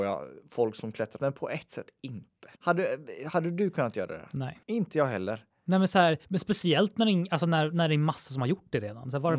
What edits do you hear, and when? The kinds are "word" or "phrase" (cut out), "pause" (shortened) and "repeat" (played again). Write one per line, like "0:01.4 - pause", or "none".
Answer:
0:01.2 - phrase
0:02.6 - pause
0:04.6 - pause
0:06.2 - pause